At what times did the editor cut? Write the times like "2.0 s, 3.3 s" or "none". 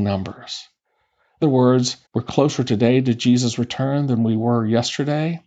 1.4 s, 2.1 s